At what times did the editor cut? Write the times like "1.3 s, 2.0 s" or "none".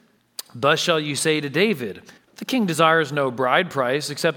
2.2 s